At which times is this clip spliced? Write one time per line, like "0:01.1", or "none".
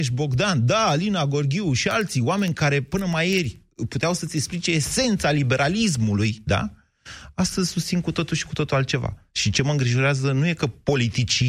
none